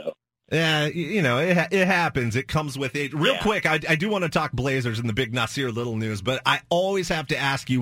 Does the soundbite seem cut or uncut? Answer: uncut